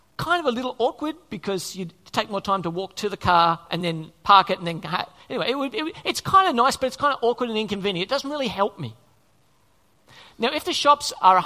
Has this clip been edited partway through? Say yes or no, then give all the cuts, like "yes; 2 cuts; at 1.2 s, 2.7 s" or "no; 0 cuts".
no; 0 cuts